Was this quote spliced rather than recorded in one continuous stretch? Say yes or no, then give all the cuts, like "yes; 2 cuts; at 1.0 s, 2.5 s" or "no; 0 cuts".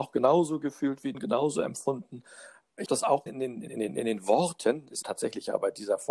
yes; 5 cuts; at 1.1 s, 2.9 s, 3.3 s, 3.7 s, 5.0 s